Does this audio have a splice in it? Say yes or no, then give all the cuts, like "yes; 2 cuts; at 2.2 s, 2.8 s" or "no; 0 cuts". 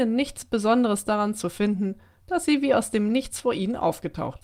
no; 0 cuts